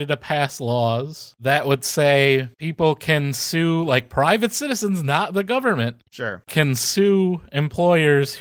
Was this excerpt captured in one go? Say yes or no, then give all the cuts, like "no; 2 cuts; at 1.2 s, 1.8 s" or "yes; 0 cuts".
yes; 0 cuts